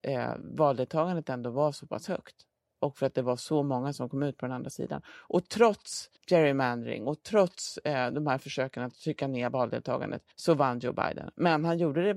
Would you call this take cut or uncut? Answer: cut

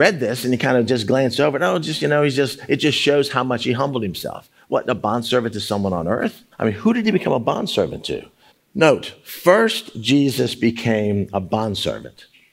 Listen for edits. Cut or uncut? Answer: cut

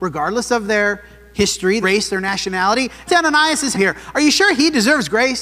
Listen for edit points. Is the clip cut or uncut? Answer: cut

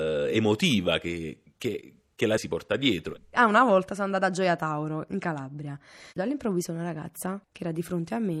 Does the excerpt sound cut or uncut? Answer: cut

